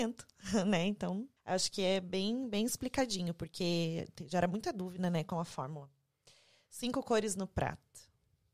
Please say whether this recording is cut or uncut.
cut